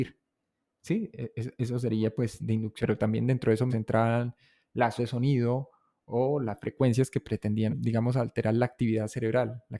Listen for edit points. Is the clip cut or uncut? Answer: cut